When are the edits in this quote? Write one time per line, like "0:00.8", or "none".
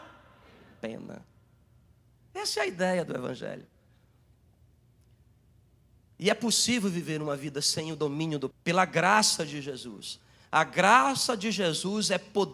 0:08.5